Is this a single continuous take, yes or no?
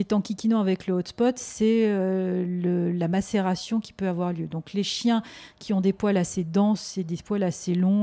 yes